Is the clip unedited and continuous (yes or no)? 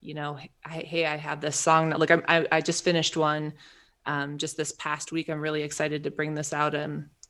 yes